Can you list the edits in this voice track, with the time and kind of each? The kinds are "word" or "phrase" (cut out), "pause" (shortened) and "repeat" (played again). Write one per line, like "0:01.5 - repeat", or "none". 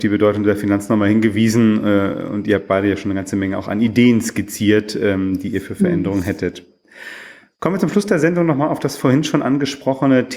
none

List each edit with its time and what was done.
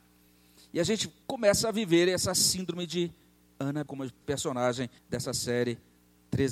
0:01.2 - pause
0:03.9 - word
0:04.2 - phrase
0:05.0 - pause

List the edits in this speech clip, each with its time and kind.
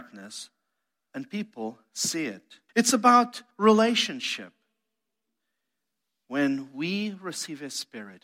0:02.7 - pause
0:03.5 - pause

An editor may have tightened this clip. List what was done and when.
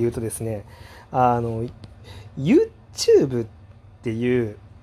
none

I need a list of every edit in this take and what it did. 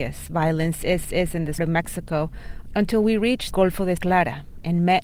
0:01.0 - repeat
0:01.6 - word
0:03.5 - word
0:04.0 - word

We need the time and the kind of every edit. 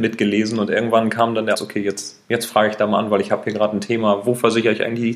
0:01.5 - word

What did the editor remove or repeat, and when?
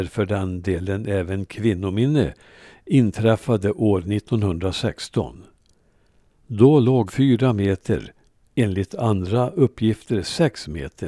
0:07.1 - word

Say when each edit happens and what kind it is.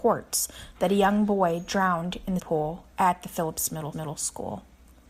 0:02.4 - word
0:02.9 - pause
0:03.9 - repeat

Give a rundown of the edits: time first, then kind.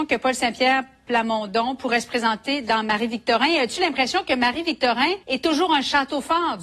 0:05.2 - pause

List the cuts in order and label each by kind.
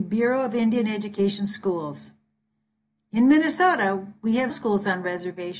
0:04.5 - word

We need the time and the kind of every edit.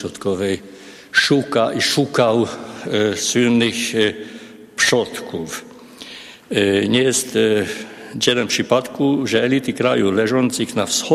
none

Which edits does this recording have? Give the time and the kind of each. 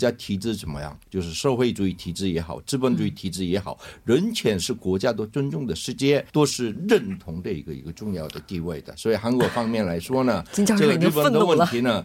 0:06.3 - pause

